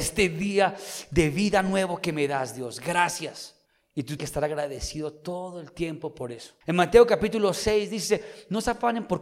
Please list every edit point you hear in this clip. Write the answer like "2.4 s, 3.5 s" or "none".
3.7 s, 4.2 s, 6.6 s